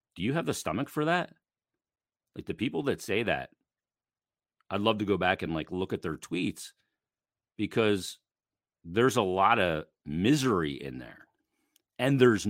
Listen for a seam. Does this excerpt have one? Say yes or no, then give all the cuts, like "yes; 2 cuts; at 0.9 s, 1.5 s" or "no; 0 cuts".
no; 0 cuts